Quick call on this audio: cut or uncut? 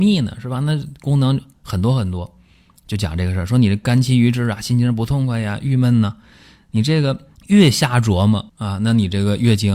cut